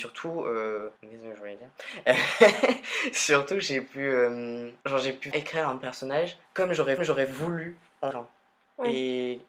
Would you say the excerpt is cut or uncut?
cut